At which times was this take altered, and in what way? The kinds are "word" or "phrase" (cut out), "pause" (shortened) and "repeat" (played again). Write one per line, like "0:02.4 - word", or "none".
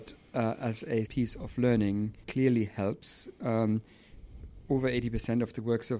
0:01.1 - word
0:02.2 - word

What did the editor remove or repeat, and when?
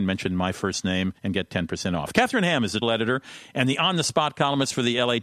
0:01.2 - pause
0:02.8 - word

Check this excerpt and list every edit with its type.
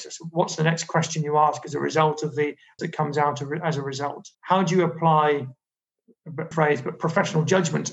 0:02.8 - word
0:04.3 - pause
0:06.5 - word

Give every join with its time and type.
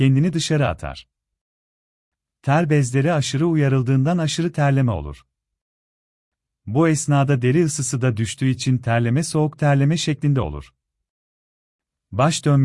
none

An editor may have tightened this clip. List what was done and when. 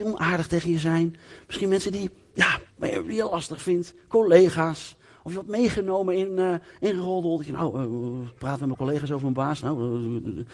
0:02.7 - pause
0:08.4 - pause

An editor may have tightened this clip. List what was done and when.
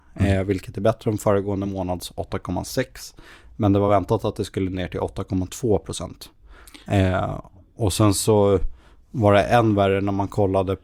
none

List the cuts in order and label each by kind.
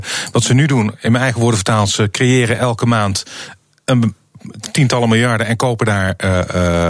none

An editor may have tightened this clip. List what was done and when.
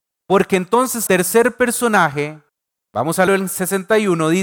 0:01.1 - word
0:02.5 - pause
0:03.3 - word

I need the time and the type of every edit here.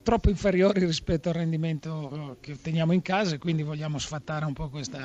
none

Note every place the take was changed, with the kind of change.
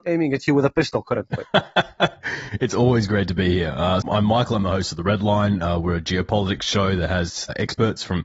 0:04.0 - word

